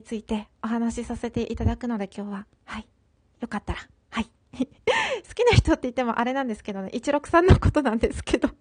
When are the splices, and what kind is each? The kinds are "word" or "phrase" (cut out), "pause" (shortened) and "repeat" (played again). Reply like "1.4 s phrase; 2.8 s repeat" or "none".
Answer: none